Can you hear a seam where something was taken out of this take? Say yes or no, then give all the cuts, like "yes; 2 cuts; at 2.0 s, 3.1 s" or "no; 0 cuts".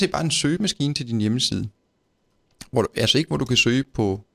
no; 0 cuts